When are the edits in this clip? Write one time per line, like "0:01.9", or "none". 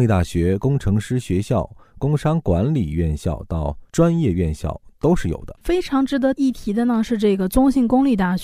0:03.9